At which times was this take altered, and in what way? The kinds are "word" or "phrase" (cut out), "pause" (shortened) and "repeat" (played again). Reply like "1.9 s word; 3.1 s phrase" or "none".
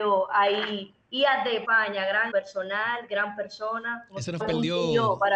1.0 s pause; 1.6 s phrase; 2.3 s word; 4.4 s word